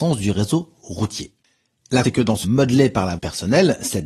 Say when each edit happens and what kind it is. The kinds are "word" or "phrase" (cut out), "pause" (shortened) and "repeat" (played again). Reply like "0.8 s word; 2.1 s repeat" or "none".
2.0 s word; 2.4 s word; 3.2 s word

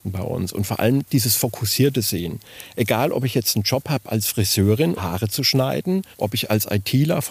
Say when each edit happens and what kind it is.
5.0 s word; 6.1 s pause

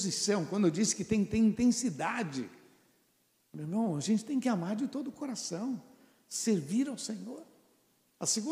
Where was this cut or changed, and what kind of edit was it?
none

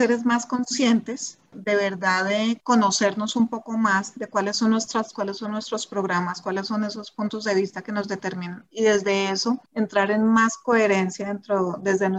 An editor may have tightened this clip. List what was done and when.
1.5 s word; 5.1 s word; 9.7 s pause

